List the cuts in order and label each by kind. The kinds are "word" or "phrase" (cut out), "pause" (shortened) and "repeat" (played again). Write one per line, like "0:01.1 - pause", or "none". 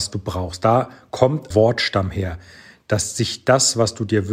0:01.5 - phrase